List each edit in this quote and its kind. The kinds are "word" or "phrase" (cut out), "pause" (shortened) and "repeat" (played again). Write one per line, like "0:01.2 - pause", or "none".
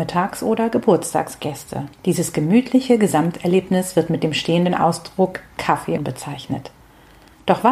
0:01.9 - pause
0:06.0 - phrase